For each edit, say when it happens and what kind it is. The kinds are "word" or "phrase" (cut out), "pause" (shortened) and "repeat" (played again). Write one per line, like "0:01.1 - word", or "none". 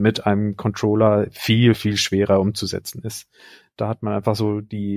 none